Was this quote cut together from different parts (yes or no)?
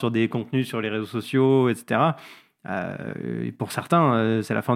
no